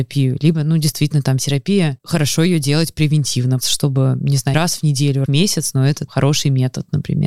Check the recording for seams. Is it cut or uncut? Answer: cut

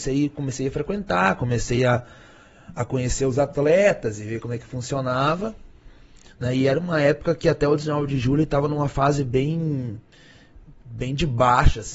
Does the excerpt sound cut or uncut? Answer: uncut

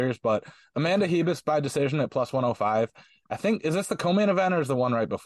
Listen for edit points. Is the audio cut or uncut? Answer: uncut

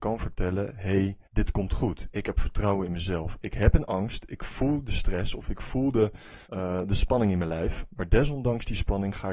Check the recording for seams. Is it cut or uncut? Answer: cut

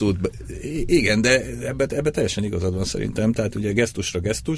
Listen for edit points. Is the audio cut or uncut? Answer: uncut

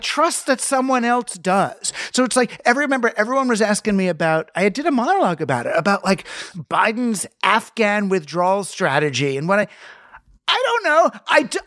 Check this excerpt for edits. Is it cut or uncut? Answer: uncut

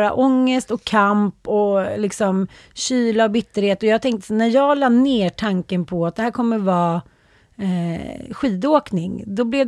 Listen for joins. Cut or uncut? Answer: uncut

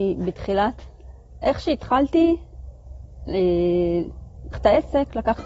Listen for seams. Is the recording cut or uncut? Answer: cut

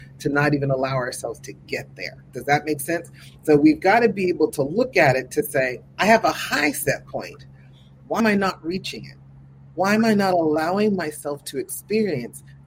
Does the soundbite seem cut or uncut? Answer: cut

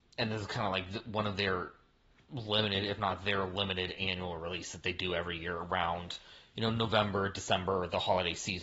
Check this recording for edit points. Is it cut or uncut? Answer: uncut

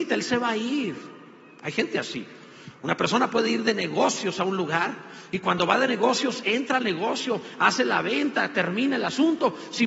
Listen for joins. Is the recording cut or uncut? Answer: uncut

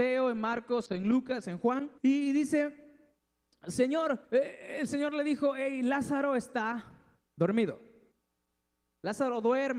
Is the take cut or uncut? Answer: cut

